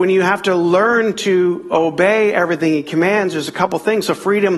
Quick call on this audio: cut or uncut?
uncut